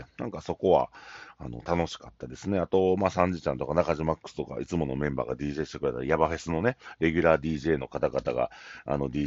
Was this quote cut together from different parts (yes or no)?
no